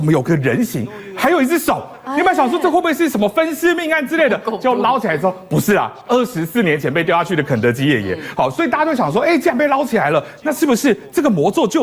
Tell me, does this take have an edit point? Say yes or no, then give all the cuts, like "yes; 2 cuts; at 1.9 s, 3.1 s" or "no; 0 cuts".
no; 0 cuts